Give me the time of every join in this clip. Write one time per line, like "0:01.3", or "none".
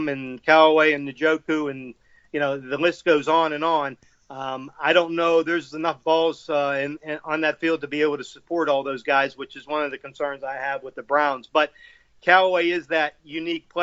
none